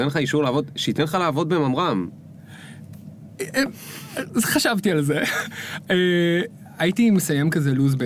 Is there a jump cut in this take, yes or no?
no